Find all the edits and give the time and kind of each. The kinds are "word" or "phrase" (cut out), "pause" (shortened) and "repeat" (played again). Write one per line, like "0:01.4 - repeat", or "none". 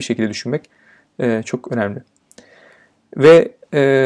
none